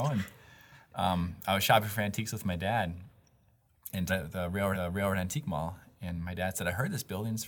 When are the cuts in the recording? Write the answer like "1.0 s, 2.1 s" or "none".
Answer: 4.1 s, 4.7 s